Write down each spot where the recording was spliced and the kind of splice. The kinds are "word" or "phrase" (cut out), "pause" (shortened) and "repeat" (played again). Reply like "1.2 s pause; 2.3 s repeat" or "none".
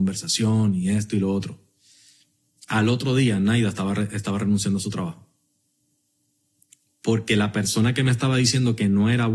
none